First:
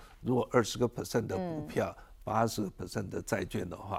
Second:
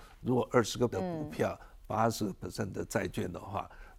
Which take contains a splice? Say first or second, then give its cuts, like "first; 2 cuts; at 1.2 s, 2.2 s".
second; 1 cut; at 0.9 s